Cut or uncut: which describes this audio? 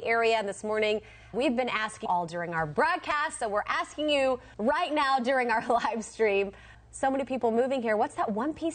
cut